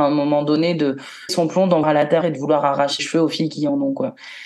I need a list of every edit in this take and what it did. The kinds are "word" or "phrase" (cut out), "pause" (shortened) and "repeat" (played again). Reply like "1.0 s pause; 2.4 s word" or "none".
1.3 s phrase; 1.8 s word; 2.2 s word; 3.0 s word